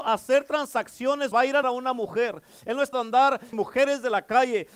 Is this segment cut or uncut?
cut